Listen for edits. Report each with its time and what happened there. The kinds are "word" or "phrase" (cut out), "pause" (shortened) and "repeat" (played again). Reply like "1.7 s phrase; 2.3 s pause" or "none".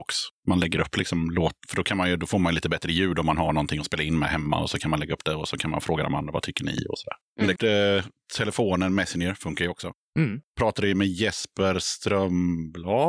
7.6 s word